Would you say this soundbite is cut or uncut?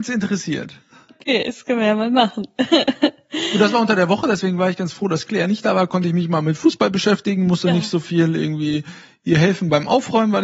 uncut